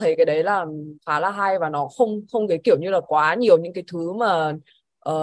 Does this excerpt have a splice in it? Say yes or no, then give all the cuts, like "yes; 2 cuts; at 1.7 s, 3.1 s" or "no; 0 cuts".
yes; 1 cut; at 1.0 s